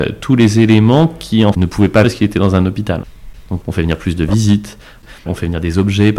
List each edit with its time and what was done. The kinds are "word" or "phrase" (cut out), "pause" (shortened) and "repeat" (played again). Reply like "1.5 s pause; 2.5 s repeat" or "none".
1.5 s word; 2.0 s word; 3.6 s word; 5.3 s word

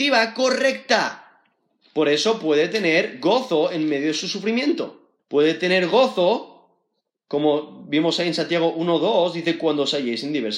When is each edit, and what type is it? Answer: 5.2 s pause

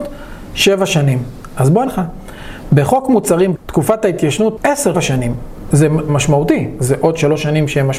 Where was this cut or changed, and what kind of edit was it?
1.9 s word; 3.5 s word; 4.6 s word; 4.9 s phrase; 6.1 s word

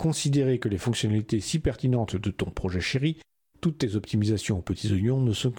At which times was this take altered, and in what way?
none

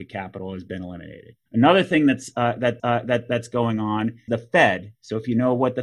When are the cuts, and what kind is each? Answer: 1.5 s pause; 2.8 s repeat; 4.3 s word

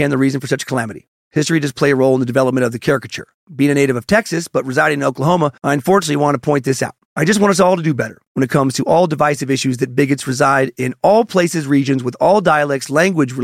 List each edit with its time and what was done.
5.6 s pause; 7.0 s pause

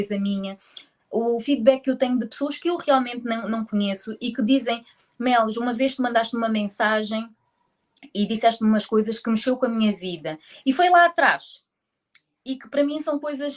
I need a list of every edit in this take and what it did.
none

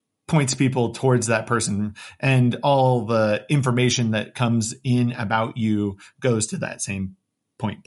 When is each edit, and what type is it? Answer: none

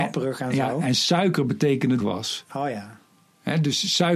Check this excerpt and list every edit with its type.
2.0 s phrase

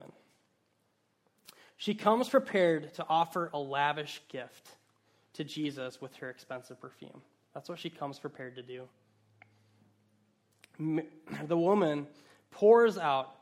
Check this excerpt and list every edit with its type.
none

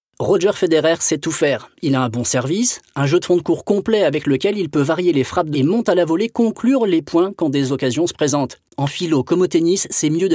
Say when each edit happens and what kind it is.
5.5 s word; 8.7 s pause

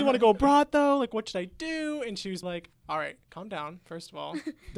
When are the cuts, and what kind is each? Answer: 2.4 s word

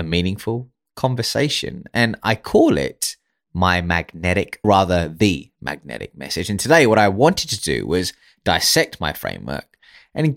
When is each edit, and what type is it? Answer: 4.6 s phrase

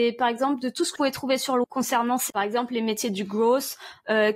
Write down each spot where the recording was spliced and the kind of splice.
1.0 s word; 1.6 s word; 2.3 s word

